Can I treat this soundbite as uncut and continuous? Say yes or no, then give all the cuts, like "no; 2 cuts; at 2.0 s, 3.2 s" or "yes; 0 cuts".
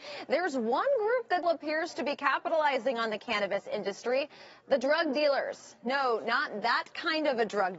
no; 1 cut; at 1.4 s